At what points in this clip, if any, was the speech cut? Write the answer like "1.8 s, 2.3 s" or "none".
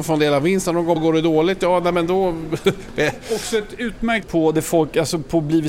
1.0 s, 4.2 s

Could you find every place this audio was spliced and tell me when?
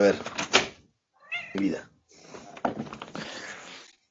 1.5 s

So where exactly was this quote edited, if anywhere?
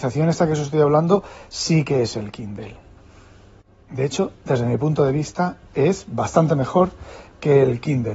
none

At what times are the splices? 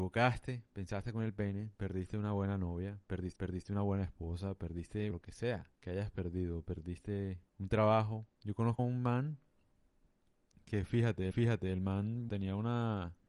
3.4 s, 5.1 s, 5.7 s, 7.5 s, 8.8 s, 11.3 s, 12.3 s

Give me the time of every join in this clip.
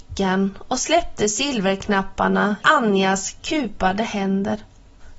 2.6 s

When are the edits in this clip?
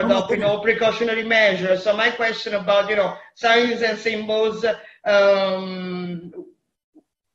none

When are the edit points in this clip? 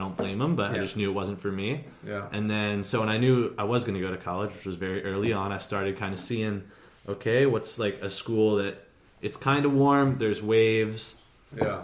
none

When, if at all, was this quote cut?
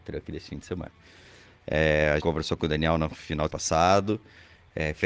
2.2 s, 3.5 s

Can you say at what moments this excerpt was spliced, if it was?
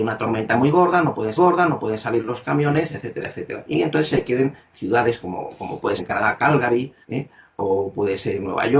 1.4 s, 6.0 s, 7.0 s

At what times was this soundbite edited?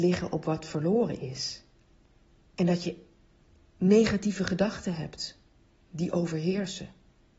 none

